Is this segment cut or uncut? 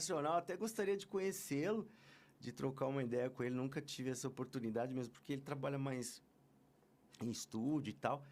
uncut